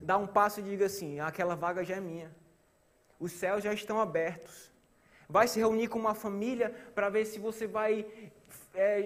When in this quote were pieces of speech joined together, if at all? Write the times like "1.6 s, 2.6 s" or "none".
none